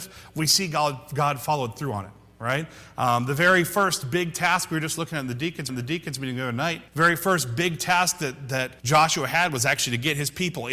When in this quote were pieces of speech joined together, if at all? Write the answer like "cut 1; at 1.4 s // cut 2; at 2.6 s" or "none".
cut 1; at 5.7 s // cut 2; at 6.9 s // cut 3; at 8.8 s